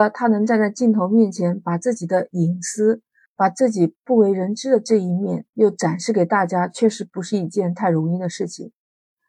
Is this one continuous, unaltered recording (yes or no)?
no